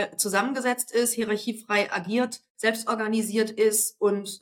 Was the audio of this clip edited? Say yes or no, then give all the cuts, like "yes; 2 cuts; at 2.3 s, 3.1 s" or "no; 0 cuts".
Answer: no; 0 cuts